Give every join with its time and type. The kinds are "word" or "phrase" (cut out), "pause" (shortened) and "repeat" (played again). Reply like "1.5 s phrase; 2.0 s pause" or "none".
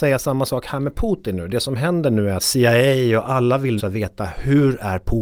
2.4 s word; 3.8 s word